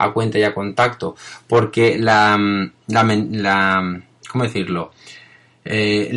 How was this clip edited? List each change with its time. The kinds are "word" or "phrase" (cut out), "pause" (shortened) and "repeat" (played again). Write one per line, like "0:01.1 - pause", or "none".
none

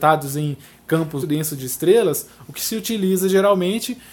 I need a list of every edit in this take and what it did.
0:01.2 - word

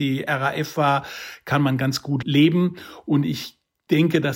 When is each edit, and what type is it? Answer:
none

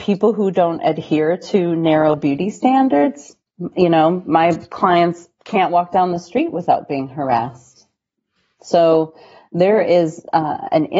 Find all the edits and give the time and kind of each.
none

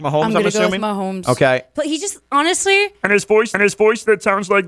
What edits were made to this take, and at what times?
0:03.5 - repeat

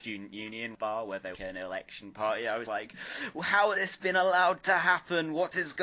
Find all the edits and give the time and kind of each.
0:01.3 - phrase
0:02.7 - word
0:03.7 - word

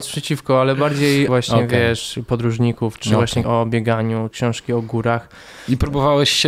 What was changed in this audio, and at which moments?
0:01.3 - word
0:03.4 - word
0:04.3 - word

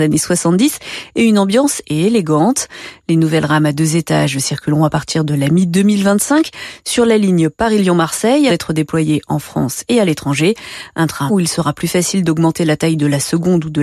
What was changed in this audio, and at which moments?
0:01.8 - word
0:08.5 - word
0:11.3 - word

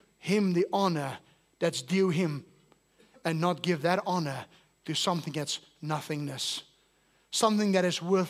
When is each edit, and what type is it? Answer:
none

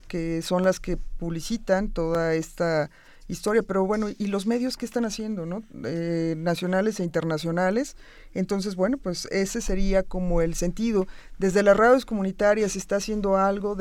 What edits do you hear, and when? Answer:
none

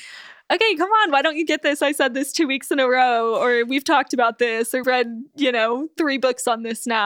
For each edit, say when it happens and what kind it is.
0:04.8 - word

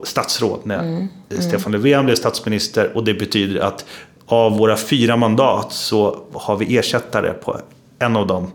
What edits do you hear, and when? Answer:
none

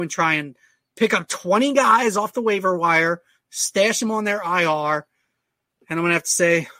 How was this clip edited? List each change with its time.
none

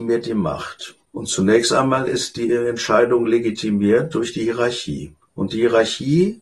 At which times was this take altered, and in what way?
none

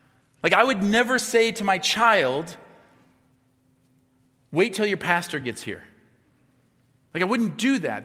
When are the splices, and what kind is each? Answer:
none

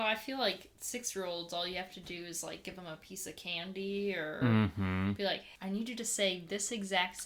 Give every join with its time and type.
0:05.6 - pause

